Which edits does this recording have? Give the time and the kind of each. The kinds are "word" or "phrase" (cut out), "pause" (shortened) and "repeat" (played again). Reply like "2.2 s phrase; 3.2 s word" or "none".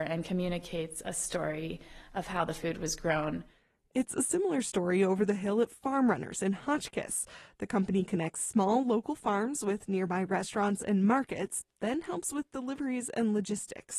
none